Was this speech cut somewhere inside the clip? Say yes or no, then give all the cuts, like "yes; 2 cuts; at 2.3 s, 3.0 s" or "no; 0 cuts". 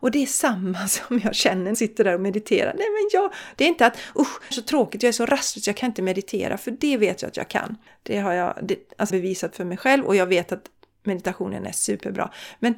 yes; 4 cuts; at 1.7 s, 4.5 s, 7.9 s, 9.1 s